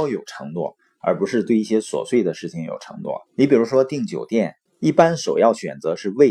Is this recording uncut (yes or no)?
no